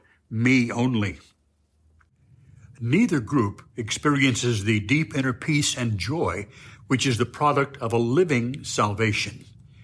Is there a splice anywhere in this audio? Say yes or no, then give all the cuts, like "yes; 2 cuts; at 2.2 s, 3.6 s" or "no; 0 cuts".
no; 0 cuts